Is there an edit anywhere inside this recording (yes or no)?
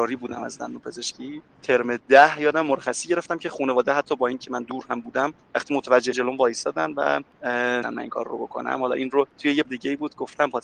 yes